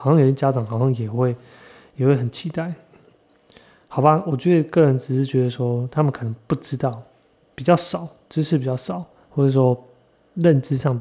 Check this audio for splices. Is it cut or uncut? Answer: uncut